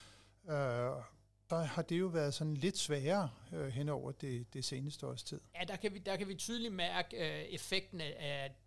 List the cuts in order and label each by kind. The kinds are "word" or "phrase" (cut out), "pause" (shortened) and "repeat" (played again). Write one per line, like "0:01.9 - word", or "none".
0:01.5 - word